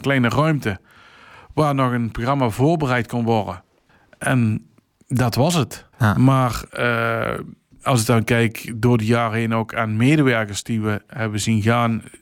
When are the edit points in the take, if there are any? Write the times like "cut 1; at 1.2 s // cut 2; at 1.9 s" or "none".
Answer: cut 1; at 3.9 s // cut 2; at 5.9 s // cut 3; at 6.7 s